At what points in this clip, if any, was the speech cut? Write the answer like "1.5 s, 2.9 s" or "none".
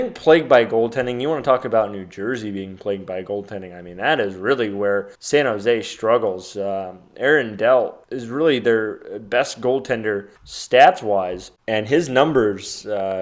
5.1 s, 8.0 s, 10.4 s, 11.6 s